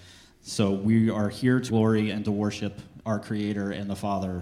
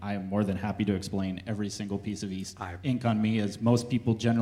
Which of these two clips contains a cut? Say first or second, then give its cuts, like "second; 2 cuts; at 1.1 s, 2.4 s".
first; 1 cut; at 1.7 s